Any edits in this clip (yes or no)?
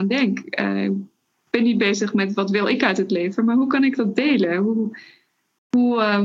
no